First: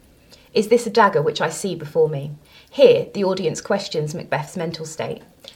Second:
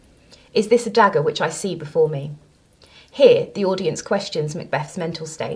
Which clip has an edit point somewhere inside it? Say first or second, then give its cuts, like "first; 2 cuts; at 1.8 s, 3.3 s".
first; 1 cut; at 2.4 s